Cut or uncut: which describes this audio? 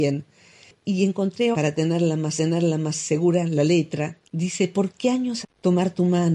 cut